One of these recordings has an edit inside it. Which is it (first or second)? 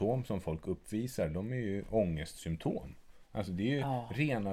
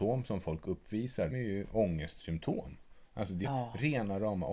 second